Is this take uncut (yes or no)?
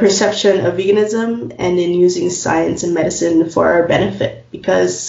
yes